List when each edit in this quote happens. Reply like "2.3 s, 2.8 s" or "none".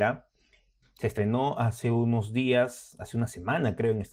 none